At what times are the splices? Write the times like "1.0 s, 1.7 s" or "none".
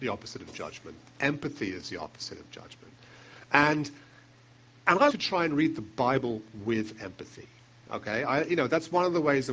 5.1 s